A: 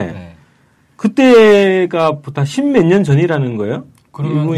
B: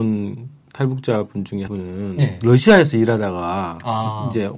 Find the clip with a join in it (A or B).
B